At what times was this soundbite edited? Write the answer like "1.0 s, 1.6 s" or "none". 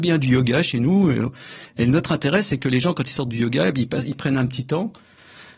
none